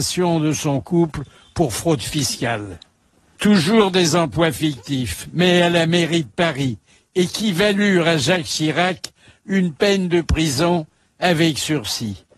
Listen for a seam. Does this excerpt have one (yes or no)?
no